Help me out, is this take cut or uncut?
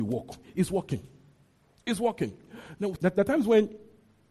cut